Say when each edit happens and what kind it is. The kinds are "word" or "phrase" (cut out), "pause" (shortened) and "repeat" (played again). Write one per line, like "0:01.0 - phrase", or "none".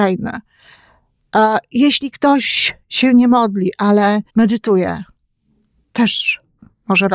0:04.3 - pause